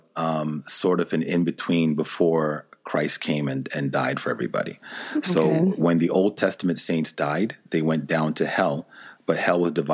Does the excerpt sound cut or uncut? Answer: uncut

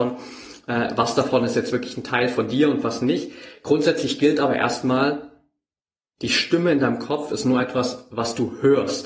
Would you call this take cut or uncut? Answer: uncut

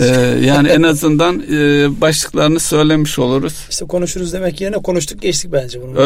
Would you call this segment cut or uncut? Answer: uncut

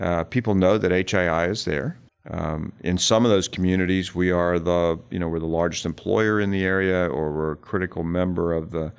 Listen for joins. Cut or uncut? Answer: cut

